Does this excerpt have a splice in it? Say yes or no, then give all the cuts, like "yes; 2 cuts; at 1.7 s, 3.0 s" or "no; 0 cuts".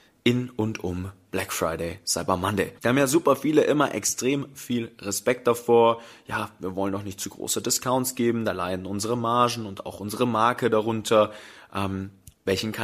yes; 1 cut; at 2.8 s